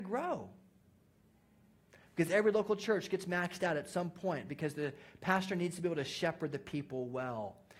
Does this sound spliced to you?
no; 0 cuts

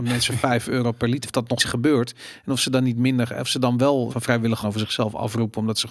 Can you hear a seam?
yes; 4 cuts; at 1.2 s, 1.6 s, 4.1 s, 4.6 s

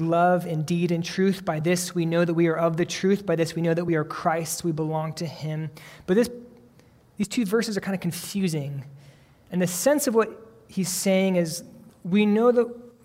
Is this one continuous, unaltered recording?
yes; 0 cuts

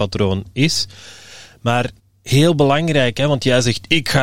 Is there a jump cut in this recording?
yes; 1 cut; at 2.0 s

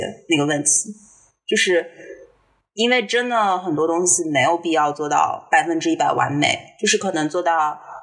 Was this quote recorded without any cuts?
yes; 0 cuts

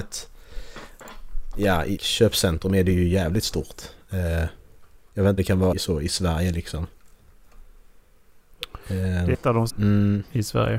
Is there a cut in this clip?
yes; 6 cuts; at 2.0 s, 5.0 s, 5.4 s, 5.7 s, 9.3 s, 9.7 s

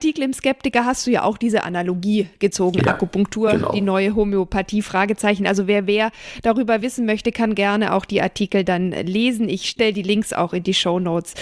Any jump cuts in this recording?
no; 0 cuts

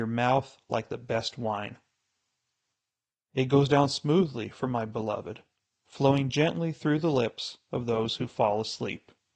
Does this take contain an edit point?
no; 0 cuts

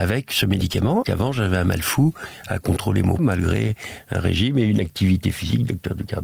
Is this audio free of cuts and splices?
no; 2 cuts; at 1.0 s, 3.2 s

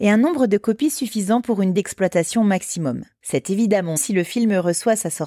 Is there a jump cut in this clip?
yes; 2 cuts; at 1.7 s, 4.0 s

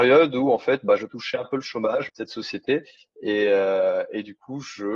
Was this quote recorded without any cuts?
no; 2 cuts; at 1.0 s, 2.1 s

